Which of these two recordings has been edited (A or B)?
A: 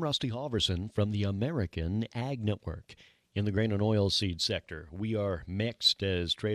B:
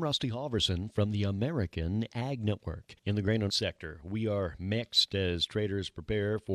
B